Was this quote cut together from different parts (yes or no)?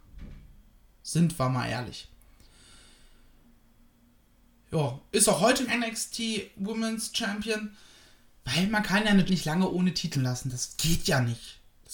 yes